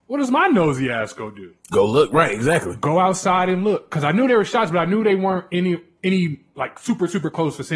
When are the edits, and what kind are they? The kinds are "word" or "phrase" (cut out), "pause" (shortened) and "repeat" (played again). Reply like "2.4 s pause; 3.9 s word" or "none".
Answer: none